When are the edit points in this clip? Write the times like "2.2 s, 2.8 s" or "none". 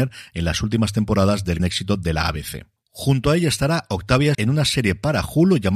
1.6 s, 4.3 s